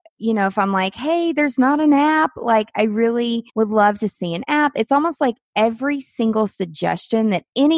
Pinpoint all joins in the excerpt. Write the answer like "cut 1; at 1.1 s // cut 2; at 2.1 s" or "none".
cut 1; at 3.5 s